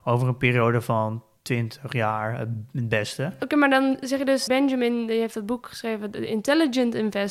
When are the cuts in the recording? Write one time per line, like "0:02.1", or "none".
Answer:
0:04.5